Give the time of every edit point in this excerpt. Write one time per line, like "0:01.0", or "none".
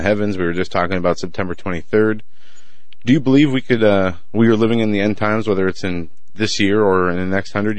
none